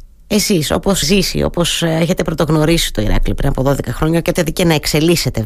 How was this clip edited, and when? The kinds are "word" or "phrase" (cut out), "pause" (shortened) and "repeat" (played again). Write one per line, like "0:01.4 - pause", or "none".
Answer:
0:01.0 - word
0:04.3 - word